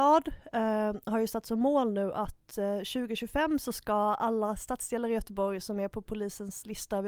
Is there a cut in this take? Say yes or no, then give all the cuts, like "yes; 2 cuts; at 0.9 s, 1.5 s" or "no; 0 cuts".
no; 0 cuts